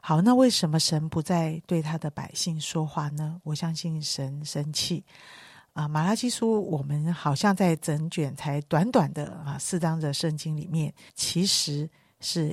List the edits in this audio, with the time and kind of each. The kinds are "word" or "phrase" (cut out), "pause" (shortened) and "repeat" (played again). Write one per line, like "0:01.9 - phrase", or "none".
0:11.1 - pause